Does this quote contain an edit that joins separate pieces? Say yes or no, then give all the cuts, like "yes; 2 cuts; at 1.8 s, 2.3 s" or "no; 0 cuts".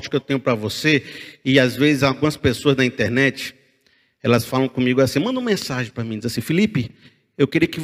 no; 0 cuts